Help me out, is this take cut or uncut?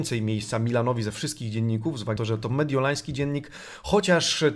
cut